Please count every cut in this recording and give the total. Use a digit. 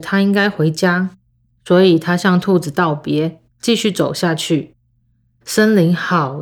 1